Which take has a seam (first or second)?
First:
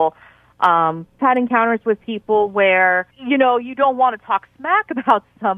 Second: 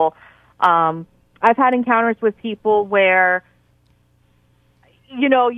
first